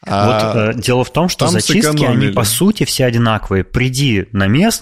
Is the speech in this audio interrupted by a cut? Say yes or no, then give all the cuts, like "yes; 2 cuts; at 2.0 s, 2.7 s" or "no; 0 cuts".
no; 0 cuts